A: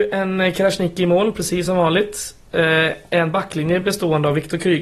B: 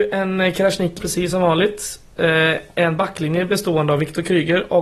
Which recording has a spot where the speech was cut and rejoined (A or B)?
B